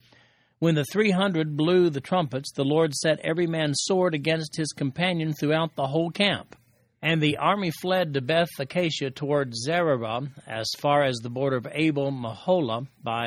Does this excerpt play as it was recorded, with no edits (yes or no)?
yes